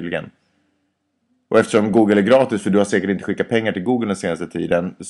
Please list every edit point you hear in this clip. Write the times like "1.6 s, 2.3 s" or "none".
none